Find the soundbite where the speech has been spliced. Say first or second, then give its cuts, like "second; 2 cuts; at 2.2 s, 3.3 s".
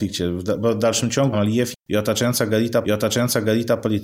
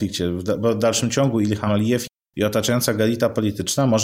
first; 3 cuts; at 1.3 s, 1.8 s, 2.8 s